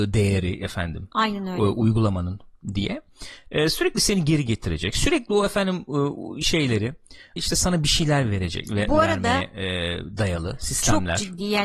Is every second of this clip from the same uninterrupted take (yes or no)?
no